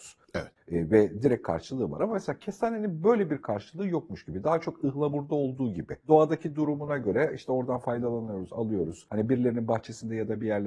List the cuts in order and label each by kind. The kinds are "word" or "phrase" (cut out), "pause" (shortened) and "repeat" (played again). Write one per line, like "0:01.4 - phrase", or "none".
none

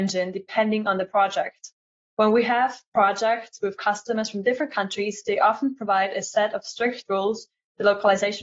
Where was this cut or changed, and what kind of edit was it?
none

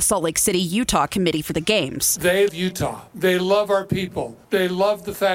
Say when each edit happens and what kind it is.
0:02.5 - word
0:03.1 - pause
0:04.4 - pause

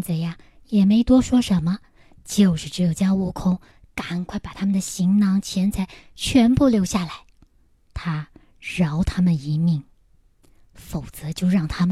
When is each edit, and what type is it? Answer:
none

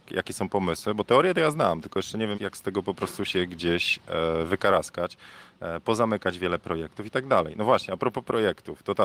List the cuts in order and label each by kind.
0:02.3 - word

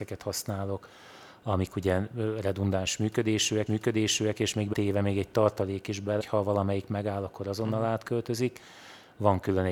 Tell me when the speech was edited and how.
0:03.7 - repeat
0:04.7 - word
0:06.2 - word

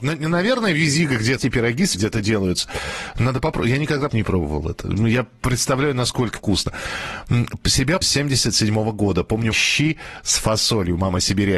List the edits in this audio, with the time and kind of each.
0:01.4 - word
0:01.9 - word
0:04.1 - word
0:06.4 - word
0:08.0 - word
0:09.5 - word

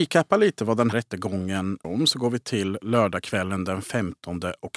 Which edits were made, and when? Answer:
0:00.9 - word
0:01.8 - word
0:02.4 - word

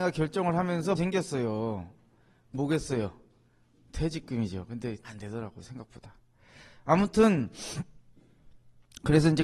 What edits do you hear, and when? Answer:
0:01.0 - word
0:02.5 - word
0:05.0 - word

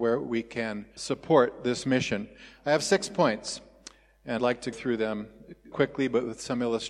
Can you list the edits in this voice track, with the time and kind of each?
0:01.0 - word
0:04.4 - word
0:04.7 - word
0:05.7 - word

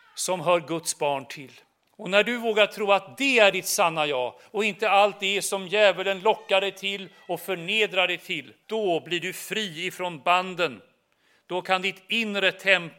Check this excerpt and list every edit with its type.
0:01.9 - pause
0:08.6 - pause

